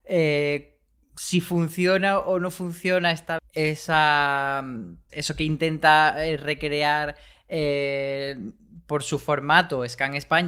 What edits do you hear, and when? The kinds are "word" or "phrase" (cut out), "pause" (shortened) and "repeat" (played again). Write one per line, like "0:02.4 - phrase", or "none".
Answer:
0:03.4 - word
0:05.1 - word